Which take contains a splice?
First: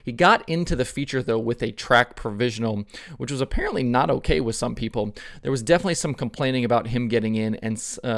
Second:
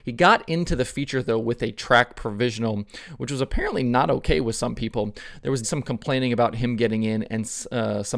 second; 1 cut; at 5.6 s

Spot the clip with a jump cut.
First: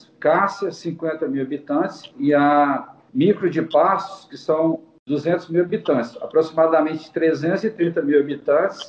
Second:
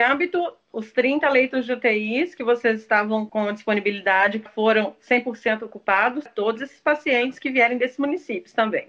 second; 2 cuts; at 4.5 s, 6.3 s

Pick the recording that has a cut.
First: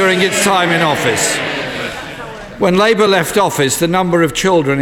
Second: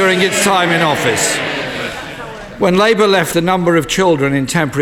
second; 1 cut; at 3.3 s

